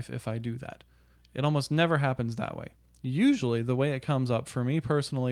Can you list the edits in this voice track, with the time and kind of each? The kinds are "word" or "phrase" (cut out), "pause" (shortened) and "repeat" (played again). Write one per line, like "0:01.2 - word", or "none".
none